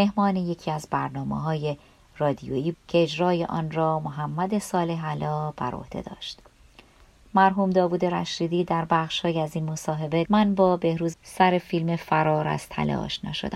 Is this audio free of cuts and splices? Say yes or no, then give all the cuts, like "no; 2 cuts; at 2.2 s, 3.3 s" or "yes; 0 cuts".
no; 3 cuts; at 2.7 s, 10.2 s, 11.1 s